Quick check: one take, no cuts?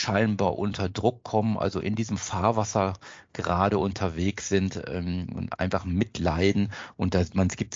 yes; 0 cuts

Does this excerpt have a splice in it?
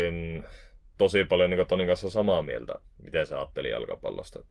yes; 1 cut; at 2.8 s

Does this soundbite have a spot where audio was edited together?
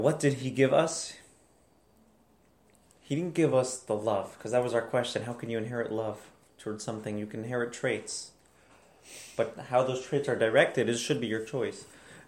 no; 0 cuts

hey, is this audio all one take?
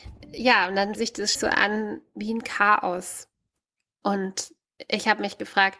no; 2 cuts; at 0.9 s, 1.3 s

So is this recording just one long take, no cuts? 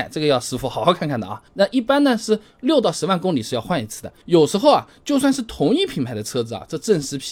no; 1 cut; at 1.5 s

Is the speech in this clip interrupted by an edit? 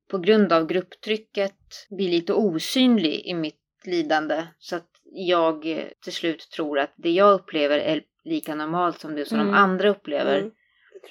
yes; 2 cuts; at 1.9 s, 5.9 s

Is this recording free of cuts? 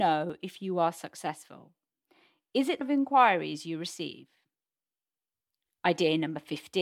no; 1 cut; at 2.8 s

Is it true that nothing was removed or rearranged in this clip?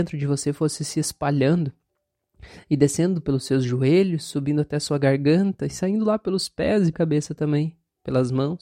no; 1 cut; at 6.9 s

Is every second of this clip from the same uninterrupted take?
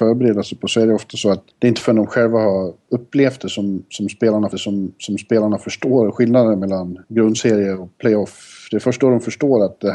no; 3 cuts; at 1.5 s, 4.5 s, 7.0 s

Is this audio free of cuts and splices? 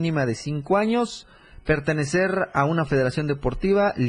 yes; 0 cuts

